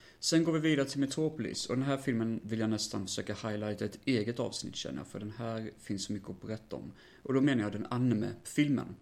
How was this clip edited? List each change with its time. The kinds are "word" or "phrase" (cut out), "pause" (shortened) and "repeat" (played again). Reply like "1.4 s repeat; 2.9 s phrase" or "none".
none